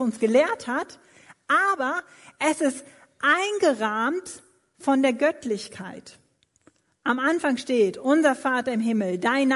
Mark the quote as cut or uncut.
uncut